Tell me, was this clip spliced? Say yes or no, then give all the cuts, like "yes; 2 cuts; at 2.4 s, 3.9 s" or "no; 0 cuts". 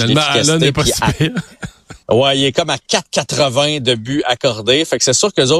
yes; 1 cut; at 2.0 s